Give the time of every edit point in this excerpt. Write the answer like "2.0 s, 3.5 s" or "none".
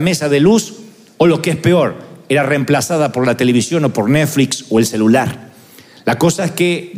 none